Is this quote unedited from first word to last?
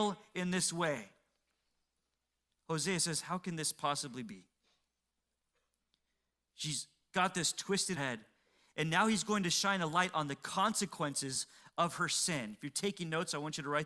no; 1 cut; at 8.0 s

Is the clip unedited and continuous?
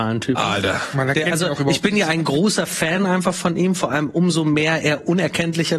yes; 0 cuts

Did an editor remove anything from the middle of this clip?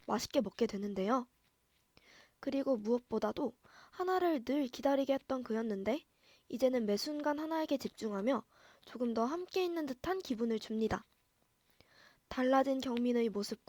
no; 0 cuts

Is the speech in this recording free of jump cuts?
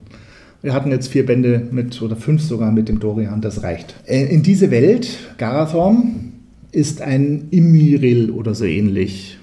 no; 1 cut; at 4.0 s

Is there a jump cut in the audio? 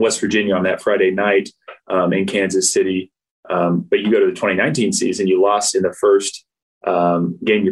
no; 0 cuts

